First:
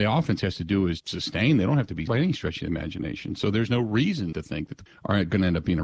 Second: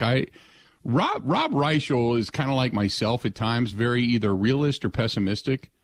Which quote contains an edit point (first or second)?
first